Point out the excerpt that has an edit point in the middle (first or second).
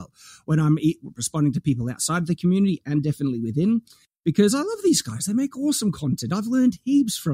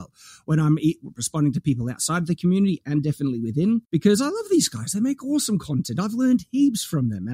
second